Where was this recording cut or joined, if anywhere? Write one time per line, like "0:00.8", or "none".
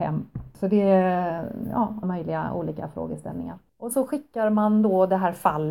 0:02.0
0:03.9